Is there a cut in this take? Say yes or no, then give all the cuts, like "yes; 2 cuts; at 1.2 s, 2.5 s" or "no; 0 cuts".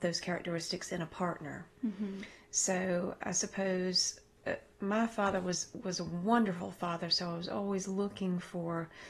no; 0 cuts